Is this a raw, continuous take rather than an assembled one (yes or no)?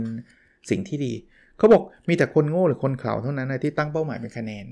yes